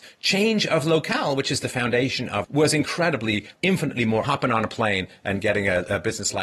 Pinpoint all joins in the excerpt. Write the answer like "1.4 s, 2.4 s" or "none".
2.4 s, 3.5 s, 4.2 s